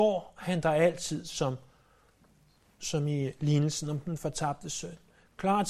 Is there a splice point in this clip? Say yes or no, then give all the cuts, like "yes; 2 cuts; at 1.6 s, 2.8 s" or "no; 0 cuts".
no; 0 cuts